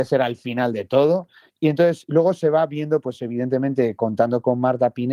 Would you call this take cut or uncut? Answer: uncut